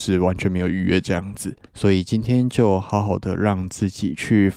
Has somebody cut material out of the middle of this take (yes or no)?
yes